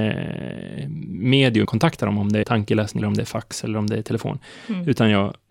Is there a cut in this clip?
yes; 3 cuts; at 1.6 s, 2.4 s, 3.0 s

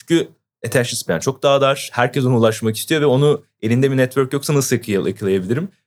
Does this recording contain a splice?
no; 0 cuts

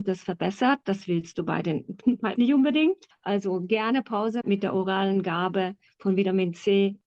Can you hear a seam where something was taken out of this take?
yes; 2 cuts; at 2.4 s, 4.4 s

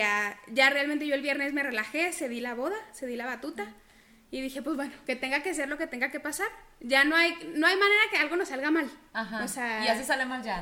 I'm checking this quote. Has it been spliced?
no; 0 cuts

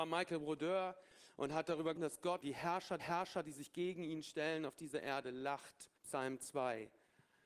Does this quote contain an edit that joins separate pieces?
yes; 4 cuts; at 2.0 s, 2.4 s, 3.0 s, 6.0 s

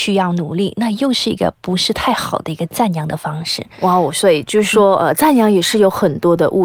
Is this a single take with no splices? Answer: yes; 0 cuts

